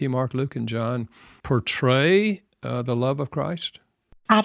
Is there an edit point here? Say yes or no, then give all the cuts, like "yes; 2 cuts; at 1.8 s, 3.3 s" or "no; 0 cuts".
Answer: no; 0 cuts